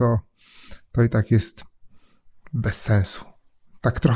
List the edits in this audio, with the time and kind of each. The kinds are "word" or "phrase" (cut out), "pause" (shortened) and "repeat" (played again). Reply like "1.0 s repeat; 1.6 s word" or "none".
none